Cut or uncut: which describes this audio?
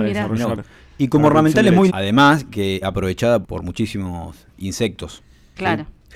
cut